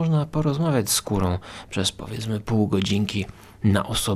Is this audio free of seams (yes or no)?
yes